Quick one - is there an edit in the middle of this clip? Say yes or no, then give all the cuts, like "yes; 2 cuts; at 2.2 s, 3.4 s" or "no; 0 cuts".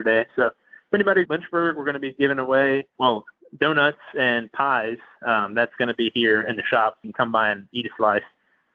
yes; 4 cuts; at 1.3 s, 3.0 s, 5.8 s, 7.0 s